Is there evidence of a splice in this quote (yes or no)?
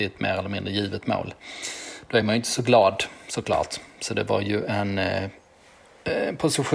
no